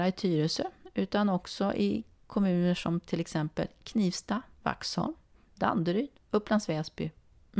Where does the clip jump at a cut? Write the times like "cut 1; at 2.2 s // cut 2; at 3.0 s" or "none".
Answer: none